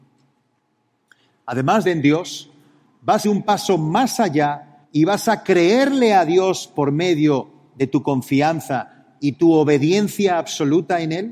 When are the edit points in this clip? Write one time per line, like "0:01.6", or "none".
0:01.8
0:03.2
0:04.8